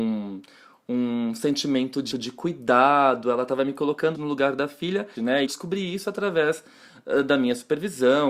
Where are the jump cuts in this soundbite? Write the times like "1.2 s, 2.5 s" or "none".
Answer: 2.1 s, 4.1 s, 5.1 s, 5.4 s